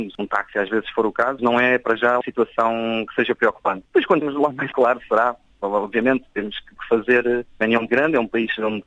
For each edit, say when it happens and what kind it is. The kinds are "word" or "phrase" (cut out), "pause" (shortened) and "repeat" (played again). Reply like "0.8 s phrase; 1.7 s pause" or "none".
1.4 s word; 2.2 s word; 4.2 s word; 4.7 s word; 6.8 s word; 7.9 s word